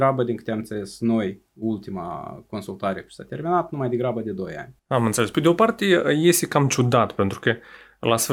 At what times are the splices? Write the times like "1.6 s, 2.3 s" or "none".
4.8 s